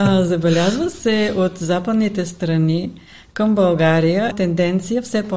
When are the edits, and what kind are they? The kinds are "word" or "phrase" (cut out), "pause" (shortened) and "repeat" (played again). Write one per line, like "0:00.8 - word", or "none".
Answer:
0:04.3 - word